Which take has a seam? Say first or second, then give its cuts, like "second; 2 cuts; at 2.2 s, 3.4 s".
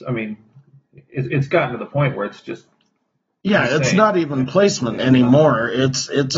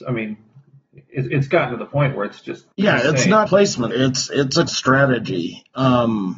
second; 4 cuts; at 2.7 s, 3.5 s, 3.9 s, 4.7 s